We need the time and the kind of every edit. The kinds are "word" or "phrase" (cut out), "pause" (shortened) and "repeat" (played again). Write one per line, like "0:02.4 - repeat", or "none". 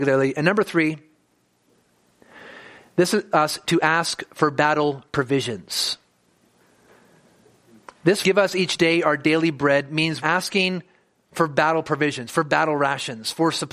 0:03.3 - word
0:08.2 - word
0:10.2 - word